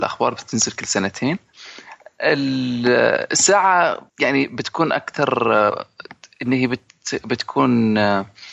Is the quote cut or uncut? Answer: cut